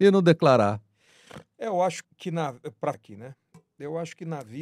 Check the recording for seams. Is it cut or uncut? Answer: cut